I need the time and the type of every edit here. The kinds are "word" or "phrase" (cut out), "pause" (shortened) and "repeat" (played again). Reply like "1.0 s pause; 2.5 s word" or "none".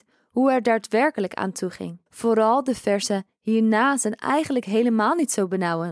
2.1 s pause